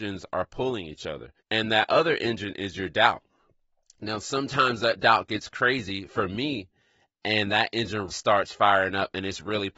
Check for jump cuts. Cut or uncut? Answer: cut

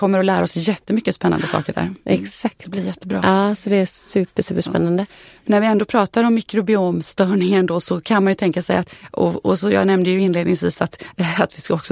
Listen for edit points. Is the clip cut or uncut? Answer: uncut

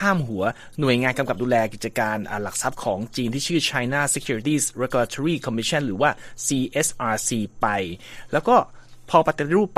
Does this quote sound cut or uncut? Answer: uncut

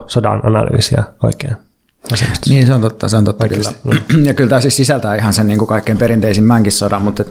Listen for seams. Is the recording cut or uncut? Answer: uncut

